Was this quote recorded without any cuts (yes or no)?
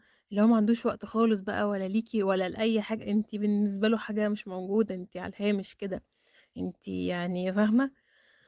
yes